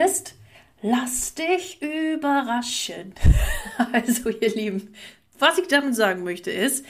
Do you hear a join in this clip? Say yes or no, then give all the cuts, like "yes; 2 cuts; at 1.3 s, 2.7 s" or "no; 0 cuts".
no; 0 cuts